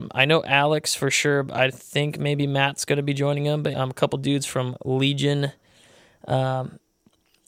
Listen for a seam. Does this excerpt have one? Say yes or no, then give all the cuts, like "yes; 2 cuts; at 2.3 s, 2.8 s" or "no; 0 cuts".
yes; 1 cut; at 3.7 s